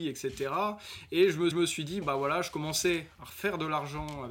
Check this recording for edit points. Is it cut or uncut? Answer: cut